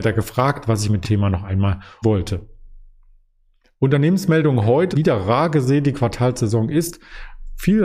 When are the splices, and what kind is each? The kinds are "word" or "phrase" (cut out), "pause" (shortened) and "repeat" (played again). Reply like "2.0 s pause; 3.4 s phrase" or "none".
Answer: 1.0 s word; 2.0 s word; 4.9 s word

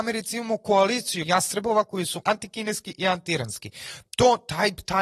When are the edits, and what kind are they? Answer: 1.2 s word; 2.2 s word

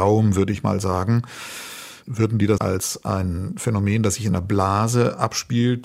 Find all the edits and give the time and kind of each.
2.6 s phrase

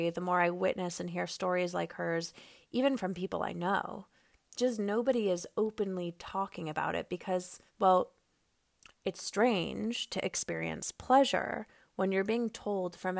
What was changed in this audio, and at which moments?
7.7 s pause

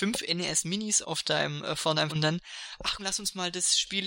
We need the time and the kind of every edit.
1.0 s word; 2.1 s word; 3.0 s word

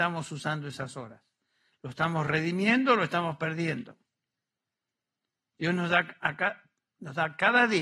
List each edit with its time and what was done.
none

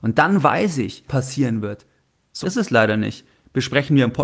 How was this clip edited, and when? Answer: 1.1 s word; 2.4 s word

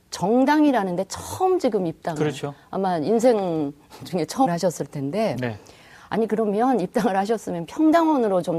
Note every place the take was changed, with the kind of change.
4.5 s word

